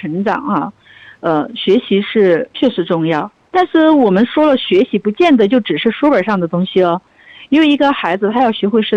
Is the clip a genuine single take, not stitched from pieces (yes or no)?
yes